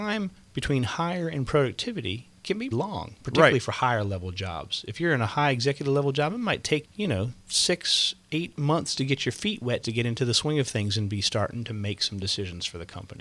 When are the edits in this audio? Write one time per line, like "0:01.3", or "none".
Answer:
0:02.7
0:06.8
0:09.0
0:09.8